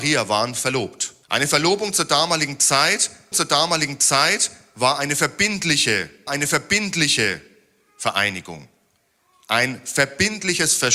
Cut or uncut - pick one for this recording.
cut